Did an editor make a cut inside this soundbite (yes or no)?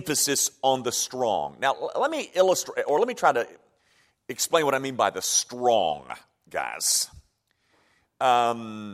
no